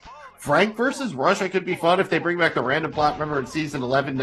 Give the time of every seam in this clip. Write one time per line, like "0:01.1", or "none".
none